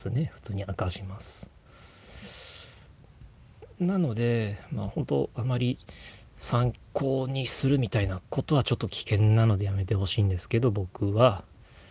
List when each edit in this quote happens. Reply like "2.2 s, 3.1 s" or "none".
6.9 s, 8.3 s